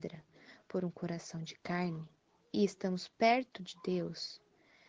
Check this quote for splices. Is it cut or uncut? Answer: uncut